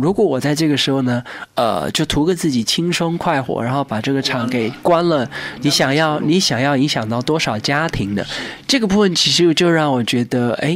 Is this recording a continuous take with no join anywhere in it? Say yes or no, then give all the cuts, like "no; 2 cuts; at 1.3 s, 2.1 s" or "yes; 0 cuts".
yes; 0 cuts